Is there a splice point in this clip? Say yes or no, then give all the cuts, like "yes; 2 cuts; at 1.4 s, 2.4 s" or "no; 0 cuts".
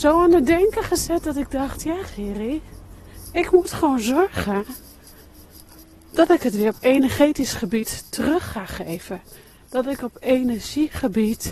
no; 0 cuts